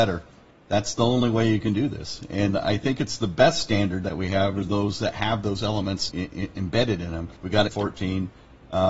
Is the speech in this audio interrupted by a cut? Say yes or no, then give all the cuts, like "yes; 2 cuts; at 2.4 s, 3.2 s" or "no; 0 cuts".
yes; 3 cuts; at 6.1 s, 7.4 s, 7.7 s